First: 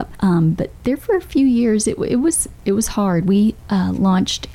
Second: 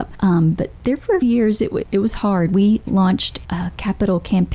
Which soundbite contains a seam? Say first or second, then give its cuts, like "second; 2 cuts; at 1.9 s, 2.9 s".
second; 4 cuts; at 1.2 s, 1.8 s, 2.9 s, 3.4 s